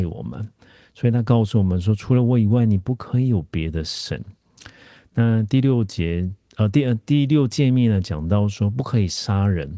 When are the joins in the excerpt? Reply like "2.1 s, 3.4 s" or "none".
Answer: none